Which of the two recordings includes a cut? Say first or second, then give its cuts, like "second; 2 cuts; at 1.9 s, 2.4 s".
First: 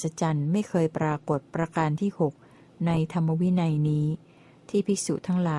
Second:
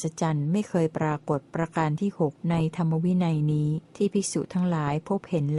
second; 2 cuts; at 2.4 s, 3.9 s